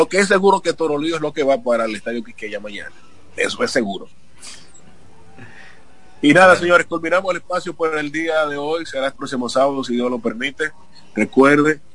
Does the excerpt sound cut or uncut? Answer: cut